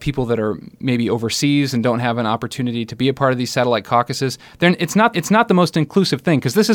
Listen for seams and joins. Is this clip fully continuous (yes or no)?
no